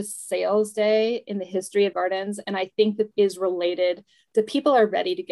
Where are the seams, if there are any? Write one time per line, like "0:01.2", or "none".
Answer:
0:01.9
0:03.1